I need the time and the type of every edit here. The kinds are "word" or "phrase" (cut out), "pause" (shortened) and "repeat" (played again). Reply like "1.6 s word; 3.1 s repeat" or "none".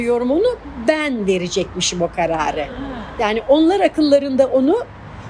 none